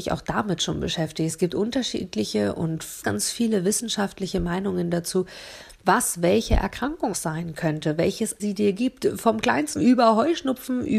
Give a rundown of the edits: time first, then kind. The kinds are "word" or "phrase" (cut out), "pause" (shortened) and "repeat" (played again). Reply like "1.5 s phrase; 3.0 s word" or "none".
3.0 s word; 7.1 s word; 8.4 s word; 9.8 s word